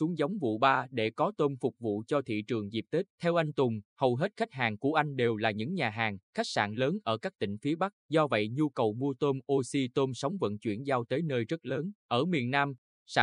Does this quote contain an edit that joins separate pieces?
yes; 5 cuts; at 3.1 s, 3.9 s, 6.2 s, 8.0 s, 12.0 s

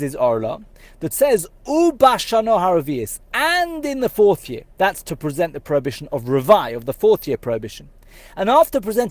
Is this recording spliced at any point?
yes; 2 cuts; at 1.1 s, 4.7 s

